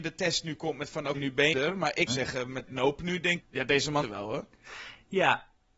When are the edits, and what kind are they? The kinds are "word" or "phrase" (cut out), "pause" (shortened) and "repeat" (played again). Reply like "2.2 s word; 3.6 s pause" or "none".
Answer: 1.1 s word; 1.5 s word; 2.1 s word; 2.7 s word; 3.4 s word; 4.0 s word